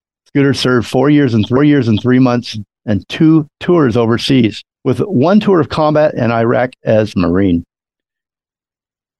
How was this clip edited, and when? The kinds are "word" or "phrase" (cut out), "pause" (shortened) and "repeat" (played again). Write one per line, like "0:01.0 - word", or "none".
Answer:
0:01.6 - repeat
0:04.7 - pause
0:07.1 - phrase